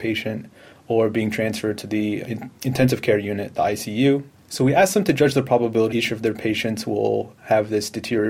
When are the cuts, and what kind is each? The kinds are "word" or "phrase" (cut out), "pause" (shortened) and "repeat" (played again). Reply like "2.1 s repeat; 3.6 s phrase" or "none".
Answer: 2.2 s word; 4.3 s pause; 5.9 s word; 7.4 s pause